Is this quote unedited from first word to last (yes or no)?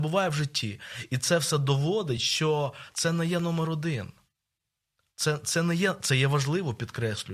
yes